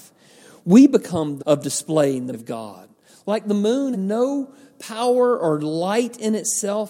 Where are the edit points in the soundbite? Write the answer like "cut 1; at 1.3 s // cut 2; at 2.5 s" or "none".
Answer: cut 1; at 1.4 s // cut 2; at 2.3 s // cut 3; at 3.9 s